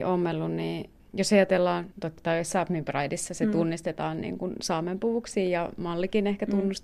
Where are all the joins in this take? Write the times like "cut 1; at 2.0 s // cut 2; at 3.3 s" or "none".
cut 1; at 1.9 s